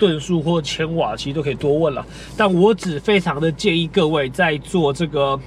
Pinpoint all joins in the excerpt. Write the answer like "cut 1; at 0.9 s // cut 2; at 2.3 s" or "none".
none